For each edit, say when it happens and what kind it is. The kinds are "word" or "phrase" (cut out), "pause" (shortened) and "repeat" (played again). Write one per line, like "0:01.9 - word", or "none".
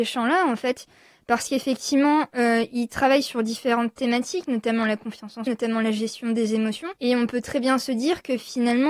0:05.5 - word
0:07.0 - pause